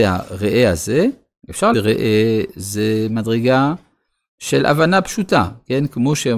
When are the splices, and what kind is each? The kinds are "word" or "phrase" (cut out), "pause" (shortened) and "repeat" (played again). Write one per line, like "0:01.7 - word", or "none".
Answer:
0:01.7 - word